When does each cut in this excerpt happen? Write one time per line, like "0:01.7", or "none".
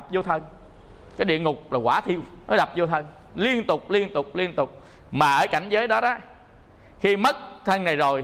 0:02.4